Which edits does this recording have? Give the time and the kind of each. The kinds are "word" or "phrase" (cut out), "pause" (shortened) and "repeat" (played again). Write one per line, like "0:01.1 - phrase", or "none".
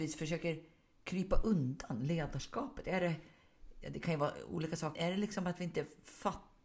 0:04.9 - phrase